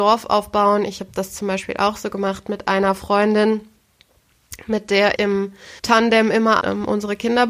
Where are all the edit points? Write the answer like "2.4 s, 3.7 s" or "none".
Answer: 5.2 s, 5.8 s, 6.6 s